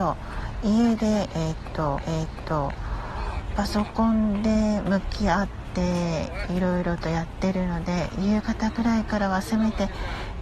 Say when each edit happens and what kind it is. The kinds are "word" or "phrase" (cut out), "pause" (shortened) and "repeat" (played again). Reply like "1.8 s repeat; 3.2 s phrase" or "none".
2.0 s repeat